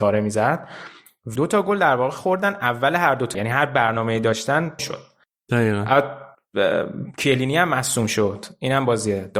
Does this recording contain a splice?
yes; 3 cuts; at 1.4 s, 3.3 s, 4.8 s

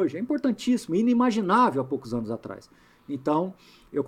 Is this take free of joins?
yes; 0 cuts

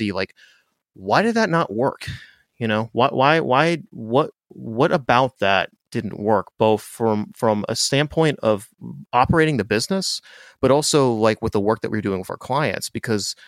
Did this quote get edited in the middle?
no; 0 cuts

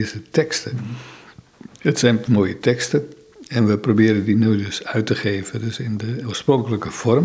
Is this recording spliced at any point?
yes; 1 cut; at 2.3 s

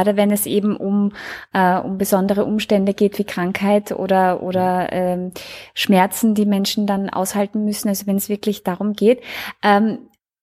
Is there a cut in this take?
no; 0 cuts

